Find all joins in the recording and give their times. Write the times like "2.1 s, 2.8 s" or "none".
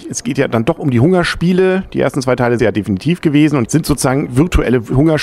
2.6 s, 3.6 s, 4.3 s

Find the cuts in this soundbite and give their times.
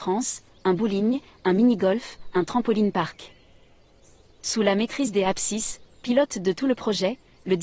none

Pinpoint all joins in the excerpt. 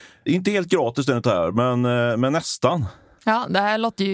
none

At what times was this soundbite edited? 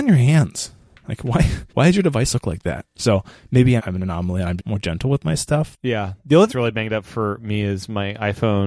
1.7 s, 3.8 s, 4.6 s, 6.5 s

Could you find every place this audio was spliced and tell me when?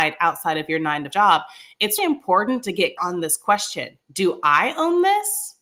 1.1 s, 2.0 s, 3.0 s, 4.0 s

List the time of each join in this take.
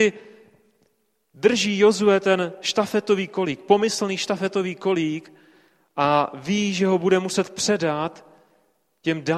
none

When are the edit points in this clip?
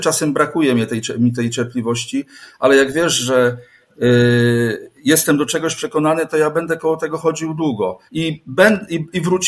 8.1 s

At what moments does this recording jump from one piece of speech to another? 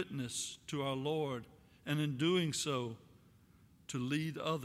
none

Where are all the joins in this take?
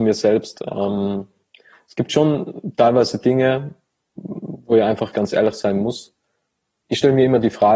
5.1 s

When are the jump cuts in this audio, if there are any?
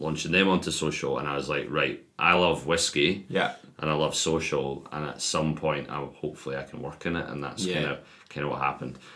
none

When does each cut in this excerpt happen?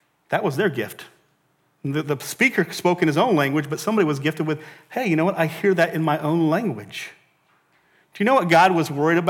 none

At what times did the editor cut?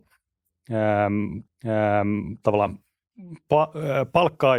1.5 s

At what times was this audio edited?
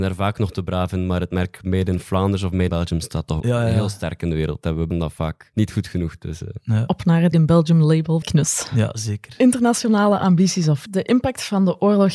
2.7 s, 3.4 s, 4.9 s, 7.3 s, 8.2 s, 10.9 s

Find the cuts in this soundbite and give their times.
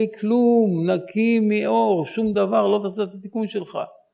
none

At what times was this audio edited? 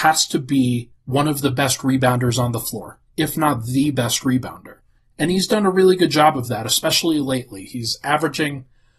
1.0 s, 5.0 s

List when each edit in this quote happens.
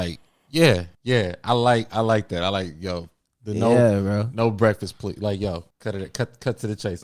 0.9 s, 5.7 s

